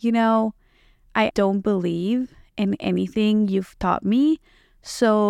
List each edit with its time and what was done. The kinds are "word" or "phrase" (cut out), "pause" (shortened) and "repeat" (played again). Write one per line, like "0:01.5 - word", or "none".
0:01.3 - word